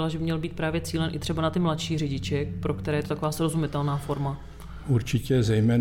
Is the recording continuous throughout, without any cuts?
yes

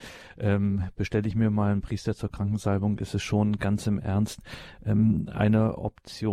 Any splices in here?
no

